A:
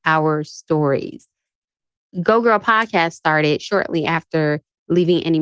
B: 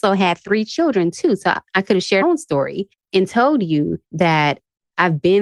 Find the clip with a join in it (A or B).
B